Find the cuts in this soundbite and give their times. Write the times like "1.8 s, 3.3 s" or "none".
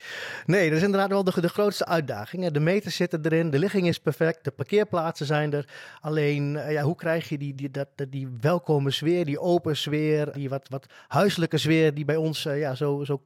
7.5 s, 10.3 s